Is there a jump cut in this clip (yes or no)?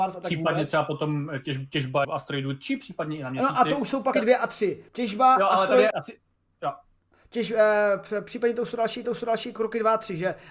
yes